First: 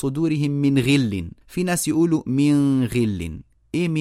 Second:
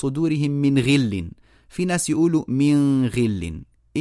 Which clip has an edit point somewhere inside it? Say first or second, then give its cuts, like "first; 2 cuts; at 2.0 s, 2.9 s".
first; 1 cut; at 1.4 s